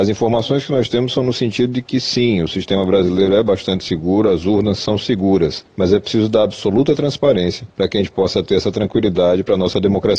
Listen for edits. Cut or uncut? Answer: uncut